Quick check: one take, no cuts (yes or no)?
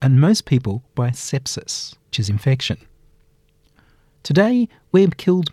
no